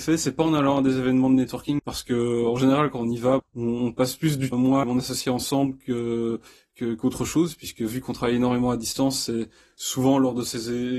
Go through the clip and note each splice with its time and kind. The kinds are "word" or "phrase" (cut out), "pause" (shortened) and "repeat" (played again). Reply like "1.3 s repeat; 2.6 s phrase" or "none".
1.8 s word; 3.4 s word; 4.5 s word; 4.8 s word